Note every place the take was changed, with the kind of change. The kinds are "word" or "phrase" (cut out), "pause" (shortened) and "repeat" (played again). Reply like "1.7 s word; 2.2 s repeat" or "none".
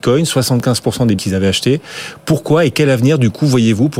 1.2 s word